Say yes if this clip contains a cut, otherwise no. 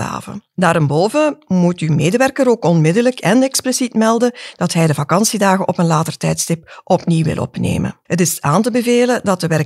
no